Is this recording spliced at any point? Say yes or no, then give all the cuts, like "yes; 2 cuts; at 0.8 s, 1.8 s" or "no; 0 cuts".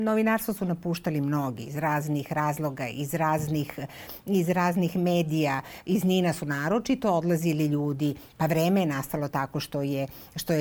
no; 0 cuts